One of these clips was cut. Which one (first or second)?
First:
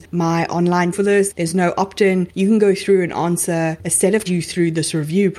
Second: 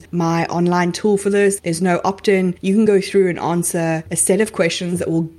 first